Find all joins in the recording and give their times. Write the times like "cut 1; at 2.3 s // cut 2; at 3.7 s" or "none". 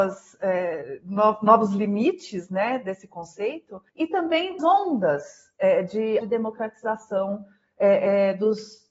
cut 1; at 3.9 s // cut 2; at 4.6 s // cut 3; at 6.2 s